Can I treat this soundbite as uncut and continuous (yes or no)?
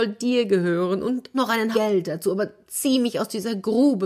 no